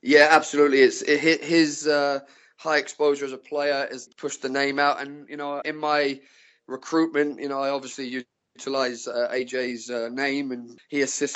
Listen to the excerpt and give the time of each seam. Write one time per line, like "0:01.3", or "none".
0:04.1
0:05.6